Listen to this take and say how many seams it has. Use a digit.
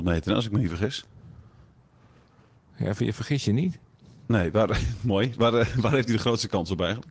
0